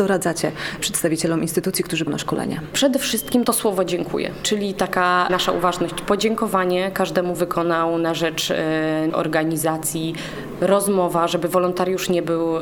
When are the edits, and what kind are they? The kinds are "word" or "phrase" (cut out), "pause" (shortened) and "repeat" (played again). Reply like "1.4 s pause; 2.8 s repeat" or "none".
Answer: 2.1 s word; 7.3 s phrase; 9.1 s word